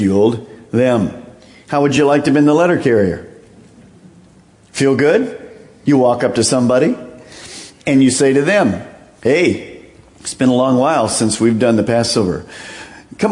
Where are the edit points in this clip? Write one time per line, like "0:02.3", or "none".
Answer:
none

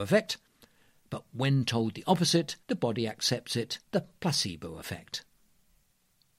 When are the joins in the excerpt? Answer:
0:02.6
0:03.8

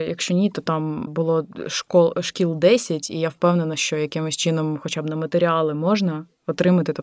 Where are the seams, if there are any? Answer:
0:01.1

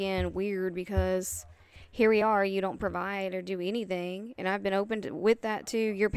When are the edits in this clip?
none

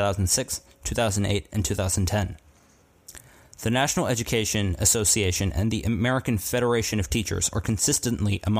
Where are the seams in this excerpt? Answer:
none

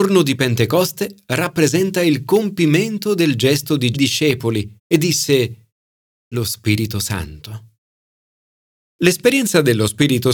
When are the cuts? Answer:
0:03.9
0:04.8
0:06.3

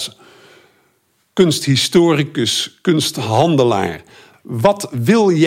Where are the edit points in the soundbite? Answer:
none

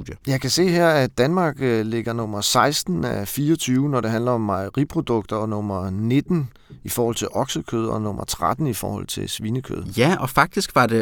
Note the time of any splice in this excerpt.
none

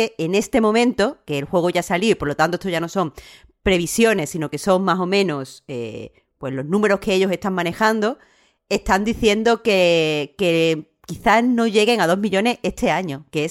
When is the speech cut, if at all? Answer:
none

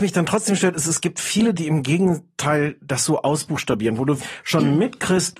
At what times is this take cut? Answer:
0:01.5
0:04.2

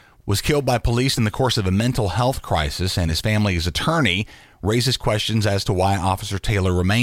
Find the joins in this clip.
none

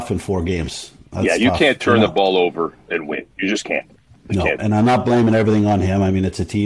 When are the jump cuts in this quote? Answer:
0:04.0
0:04.6

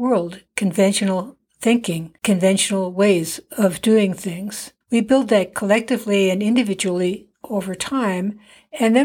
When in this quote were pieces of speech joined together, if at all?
0:02.2
0:04.8

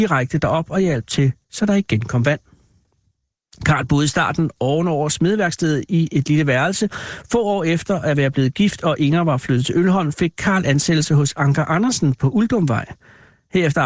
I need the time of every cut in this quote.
0:01.4

